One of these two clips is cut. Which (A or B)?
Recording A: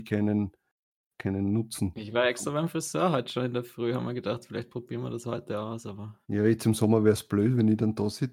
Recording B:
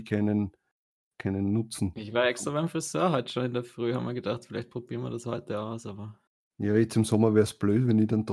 A